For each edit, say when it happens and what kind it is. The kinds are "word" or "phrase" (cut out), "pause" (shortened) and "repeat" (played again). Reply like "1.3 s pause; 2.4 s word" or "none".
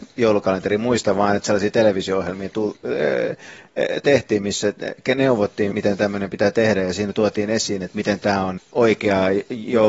5.7 s word; 8.6 s phrase